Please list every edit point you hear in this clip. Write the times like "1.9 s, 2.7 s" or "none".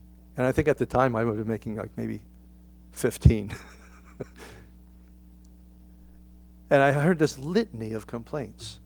none